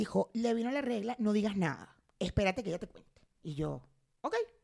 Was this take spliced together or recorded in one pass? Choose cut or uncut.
cut